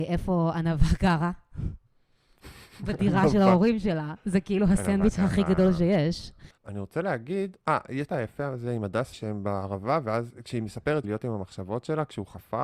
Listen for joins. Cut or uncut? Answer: cut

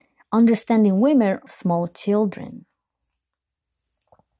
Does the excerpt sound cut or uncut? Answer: cut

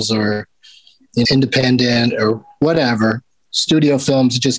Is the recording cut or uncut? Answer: cut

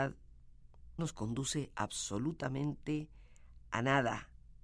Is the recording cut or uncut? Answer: cut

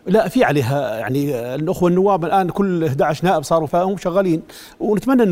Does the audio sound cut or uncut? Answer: cut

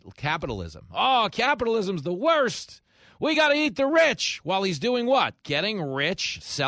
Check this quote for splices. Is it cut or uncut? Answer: uncut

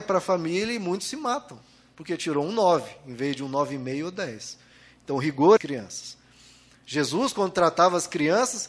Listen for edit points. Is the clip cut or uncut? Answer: cut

